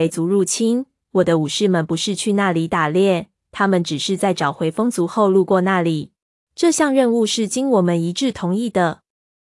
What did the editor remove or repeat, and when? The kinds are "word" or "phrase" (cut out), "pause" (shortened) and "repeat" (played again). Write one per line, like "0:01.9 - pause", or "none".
0:06.4 - pause